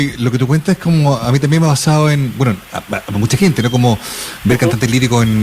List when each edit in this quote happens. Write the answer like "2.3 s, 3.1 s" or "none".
none